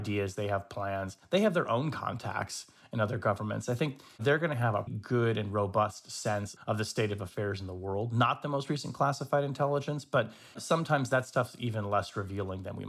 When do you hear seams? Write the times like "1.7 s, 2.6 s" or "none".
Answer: 4.9 s